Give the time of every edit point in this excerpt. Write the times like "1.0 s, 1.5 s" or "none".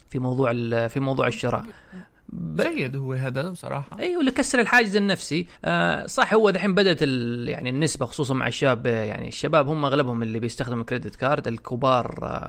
5.5 s